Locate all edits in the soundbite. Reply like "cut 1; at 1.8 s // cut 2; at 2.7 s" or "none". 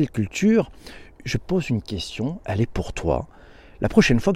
none